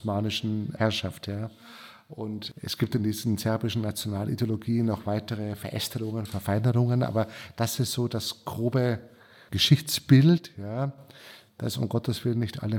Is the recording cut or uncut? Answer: uncut